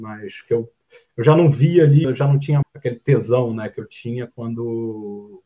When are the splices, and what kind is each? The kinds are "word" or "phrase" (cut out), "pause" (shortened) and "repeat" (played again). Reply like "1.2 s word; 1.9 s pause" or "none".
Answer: 2.0 s word; 2.6 s phrase